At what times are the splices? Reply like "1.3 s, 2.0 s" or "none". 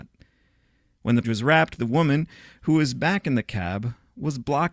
1.2 s